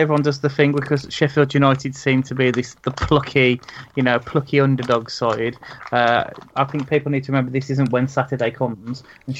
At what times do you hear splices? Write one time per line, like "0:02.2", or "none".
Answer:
none